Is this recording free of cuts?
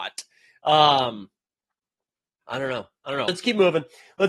no; 2 cuts; at 2.4 s, 3.3 s

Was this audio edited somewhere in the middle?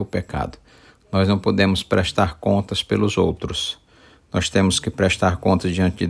no; 0 cuts

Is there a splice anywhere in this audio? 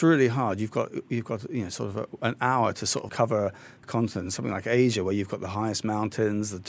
yes; 1 cut; at 3.1 s

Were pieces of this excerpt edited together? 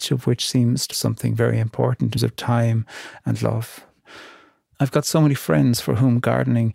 yes; 2 cuts; at 0.9 s, 2.2 s

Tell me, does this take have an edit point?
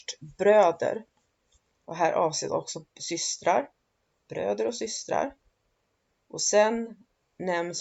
no; 0 cuts

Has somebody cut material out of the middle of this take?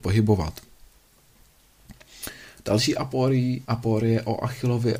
yes; 1 cut; at 3.6 s

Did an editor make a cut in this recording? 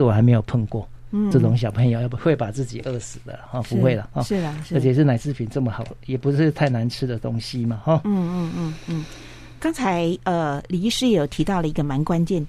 yes; 1 cut; at 1.3 s

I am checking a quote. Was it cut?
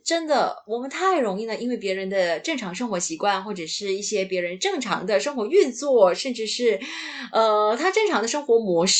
no; 0 cuts

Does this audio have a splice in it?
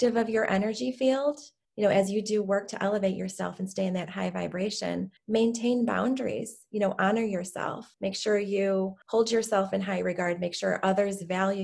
no; 0 cuts

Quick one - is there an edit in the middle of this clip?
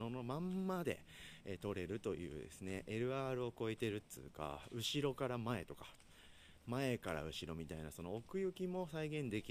no; 0 cuts

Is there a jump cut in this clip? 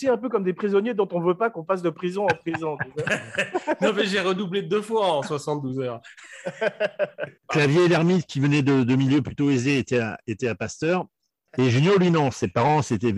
yes; 1 cut; at 7.4 s

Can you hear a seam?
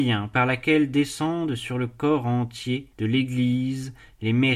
yes; 1 cut; at 2.9 s

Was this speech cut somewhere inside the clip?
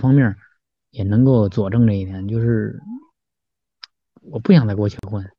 no; 0 cuts

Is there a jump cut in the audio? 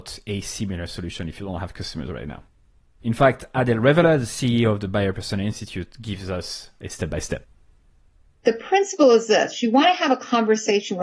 no; 0 cuts

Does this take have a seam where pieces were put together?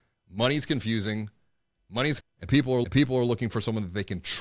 yes; 2 cuts; at 2.2 s, 2.8 s

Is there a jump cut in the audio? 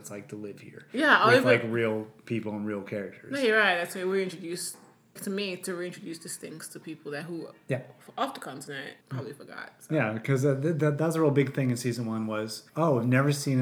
yes; 3 cuts; at 5.2 s, 9.0 s, 12.7 s

